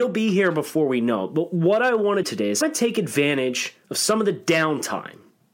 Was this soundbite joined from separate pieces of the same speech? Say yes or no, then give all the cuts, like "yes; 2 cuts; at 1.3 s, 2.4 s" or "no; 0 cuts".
yes; 3 cuts; at 2.2 s, 2.6 s, 3.8 s